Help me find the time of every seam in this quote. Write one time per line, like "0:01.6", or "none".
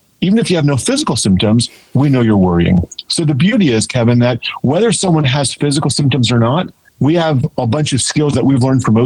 0:06.9